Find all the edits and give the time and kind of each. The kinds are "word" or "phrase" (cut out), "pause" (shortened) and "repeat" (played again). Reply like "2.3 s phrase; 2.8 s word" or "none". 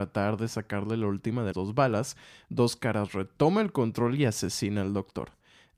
1.5 s word